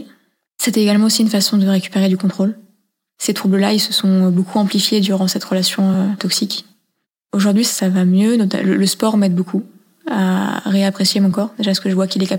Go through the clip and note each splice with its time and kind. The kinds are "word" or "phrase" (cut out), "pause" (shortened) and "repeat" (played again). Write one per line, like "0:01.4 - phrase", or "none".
none